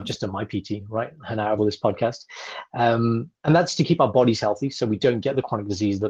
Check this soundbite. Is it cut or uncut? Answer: cut